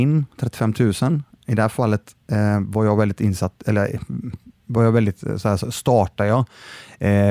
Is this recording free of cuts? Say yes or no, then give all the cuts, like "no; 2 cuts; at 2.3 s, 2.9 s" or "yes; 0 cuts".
yes; 0 cuts